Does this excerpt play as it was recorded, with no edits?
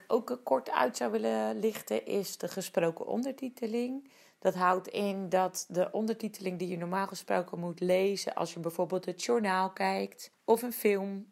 yes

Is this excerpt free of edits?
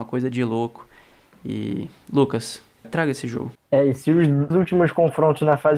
no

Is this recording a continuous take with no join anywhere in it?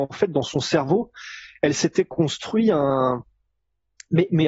yes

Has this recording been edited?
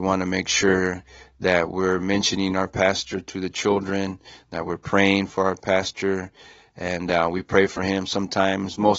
no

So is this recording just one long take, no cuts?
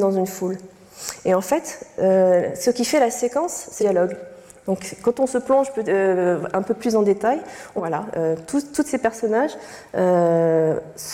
no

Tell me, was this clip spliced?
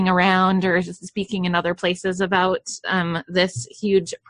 no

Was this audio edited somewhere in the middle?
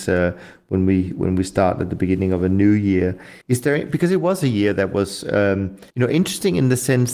yes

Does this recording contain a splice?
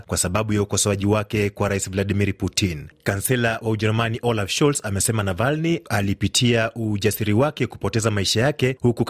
no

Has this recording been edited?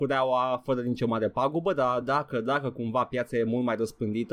no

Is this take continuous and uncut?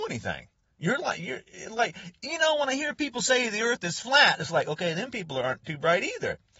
yes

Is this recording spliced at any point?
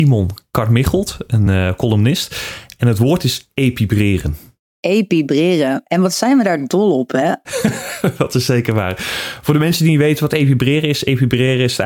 no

